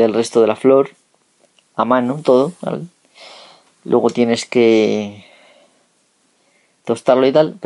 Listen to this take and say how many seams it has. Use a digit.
0